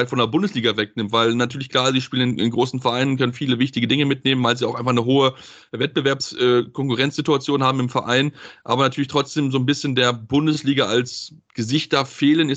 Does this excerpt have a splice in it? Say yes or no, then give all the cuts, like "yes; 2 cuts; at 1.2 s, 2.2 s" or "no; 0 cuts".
no; 0 cuts